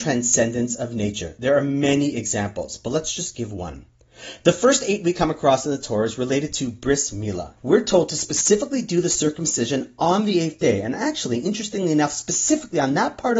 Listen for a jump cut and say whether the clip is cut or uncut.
cut